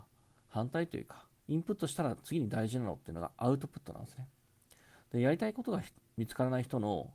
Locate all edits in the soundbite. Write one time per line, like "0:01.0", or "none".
0:01.4